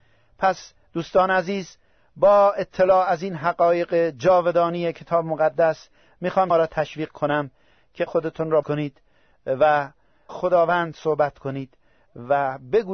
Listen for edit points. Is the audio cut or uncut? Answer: cut